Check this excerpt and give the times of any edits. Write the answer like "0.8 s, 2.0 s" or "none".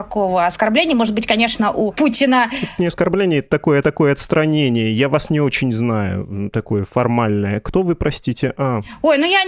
3.8 s